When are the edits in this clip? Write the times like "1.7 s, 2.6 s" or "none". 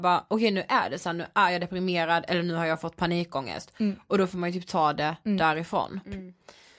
none